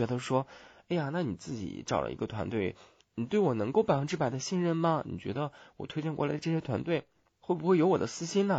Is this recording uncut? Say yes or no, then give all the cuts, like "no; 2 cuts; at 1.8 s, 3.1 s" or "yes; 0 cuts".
yes; 0 cuts